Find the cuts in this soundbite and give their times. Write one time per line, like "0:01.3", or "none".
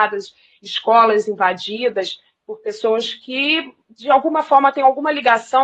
none